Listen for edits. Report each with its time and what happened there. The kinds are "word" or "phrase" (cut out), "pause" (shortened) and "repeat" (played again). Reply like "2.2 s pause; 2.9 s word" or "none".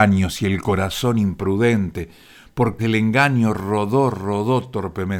2.8 s word